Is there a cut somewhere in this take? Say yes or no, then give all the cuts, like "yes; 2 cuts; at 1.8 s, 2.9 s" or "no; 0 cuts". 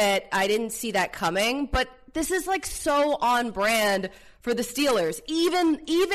no; 0 cuts